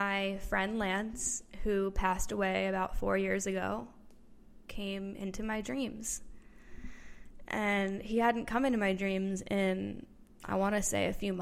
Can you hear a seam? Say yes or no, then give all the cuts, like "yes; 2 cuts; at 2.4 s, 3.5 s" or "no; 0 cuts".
no; 0 cuts